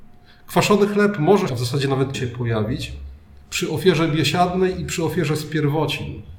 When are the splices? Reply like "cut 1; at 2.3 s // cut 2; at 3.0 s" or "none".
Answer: cut 1; at 1.5 s // cut 2; at 2.1 s